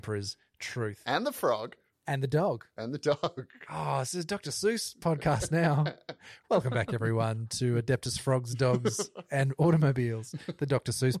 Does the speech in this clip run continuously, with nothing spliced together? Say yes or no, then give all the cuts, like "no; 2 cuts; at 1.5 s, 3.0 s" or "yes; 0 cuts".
yes; 0 cuts